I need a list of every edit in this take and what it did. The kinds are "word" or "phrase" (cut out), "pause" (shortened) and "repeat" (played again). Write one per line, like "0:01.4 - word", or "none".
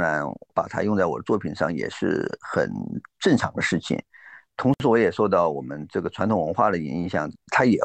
none

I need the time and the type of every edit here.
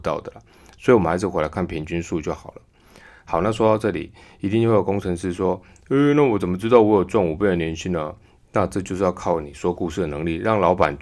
none

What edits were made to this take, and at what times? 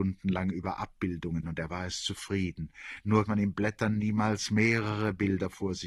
0:01.4 - phrase
0:03.3 - phrase

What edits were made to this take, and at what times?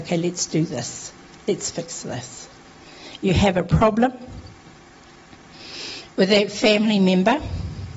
none

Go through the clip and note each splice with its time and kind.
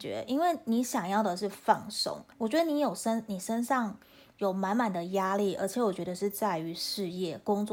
0:02.3 - pause

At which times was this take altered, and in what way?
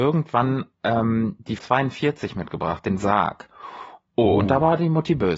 0:01.6 - word
0:03.0 - word

